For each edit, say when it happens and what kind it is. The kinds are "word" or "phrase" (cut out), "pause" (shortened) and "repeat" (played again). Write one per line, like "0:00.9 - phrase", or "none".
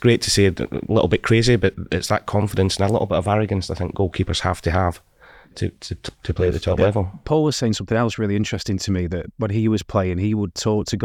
none